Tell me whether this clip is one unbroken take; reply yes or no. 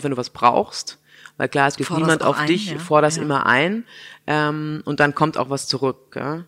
no